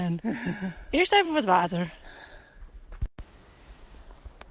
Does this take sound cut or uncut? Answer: uncut